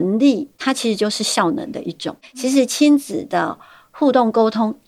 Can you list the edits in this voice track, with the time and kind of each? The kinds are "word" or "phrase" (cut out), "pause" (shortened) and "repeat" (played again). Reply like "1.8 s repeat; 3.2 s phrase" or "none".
none